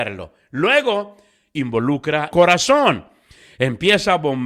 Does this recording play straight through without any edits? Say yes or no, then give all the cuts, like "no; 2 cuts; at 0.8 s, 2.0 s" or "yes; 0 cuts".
no; 1 cut; at 2.3 s